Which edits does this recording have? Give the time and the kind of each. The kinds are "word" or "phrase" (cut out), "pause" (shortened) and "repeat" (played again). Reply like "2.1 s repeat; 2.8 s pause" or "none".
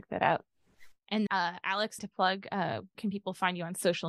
1.3 s word; 2.0 s word; 2.9 s word